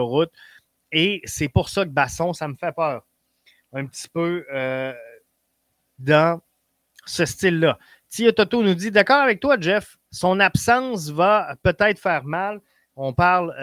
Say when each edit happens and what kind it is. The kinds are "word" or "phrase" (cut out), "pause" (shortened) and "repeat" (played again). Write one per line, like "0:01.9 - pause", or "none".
0:10.1 - pause